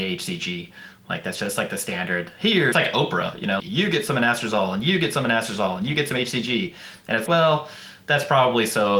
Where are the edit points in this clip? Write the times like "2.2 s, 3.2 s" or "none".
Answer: 2.7 s, 3.6 s, 7.3 s

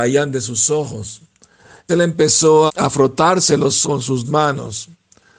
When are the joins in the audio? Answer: 1.9 s, 2.7 s, 3.8 s, 4.2 s

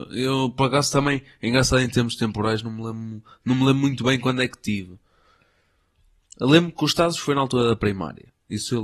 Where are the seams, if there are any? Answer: none

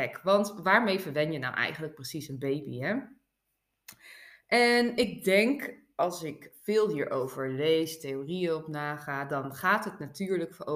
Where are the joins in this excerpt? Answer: none

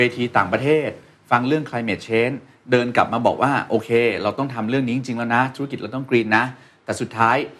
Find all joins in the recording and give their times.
none

